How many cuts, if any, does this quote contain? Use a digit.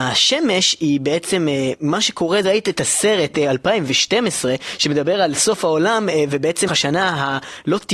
2